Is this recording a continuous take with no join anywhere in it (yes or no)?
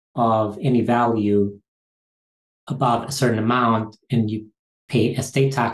yes